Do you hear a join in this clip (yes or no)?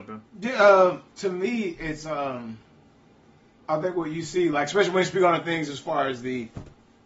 yes